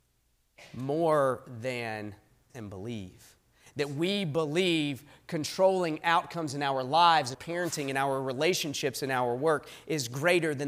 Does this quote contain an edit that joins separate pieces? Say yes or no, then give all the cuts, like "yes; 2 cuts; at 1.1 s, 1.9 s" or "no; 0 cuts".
yes; 2 cuts; at 2.5 s, 7.3 s